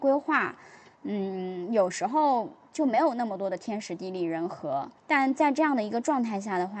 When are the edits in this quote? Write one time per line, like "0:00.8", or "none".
0:05.0